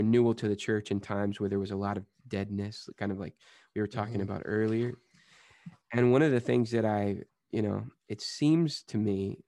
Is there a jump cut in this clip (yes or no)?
yes